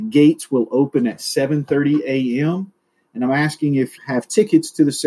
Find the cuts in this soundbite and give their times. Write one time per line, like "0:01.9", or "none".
0:04.0